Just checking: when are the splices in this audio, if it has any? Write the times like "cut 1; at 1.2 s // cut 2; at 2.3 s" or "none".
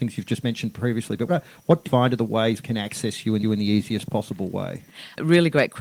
cut 1; at 1.3 s // cut 2; at 1.8 s // cut 3; at 2.6 s // cut 4; at 3.4 s